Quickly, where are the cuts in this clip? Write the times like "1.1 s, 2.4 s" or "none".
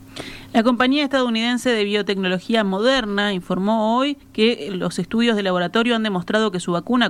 4.2 s